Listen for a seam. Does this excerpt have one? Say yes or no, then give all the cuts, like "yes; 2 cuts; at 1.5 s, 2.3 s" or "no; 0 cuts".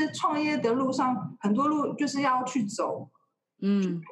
no; 0 cuts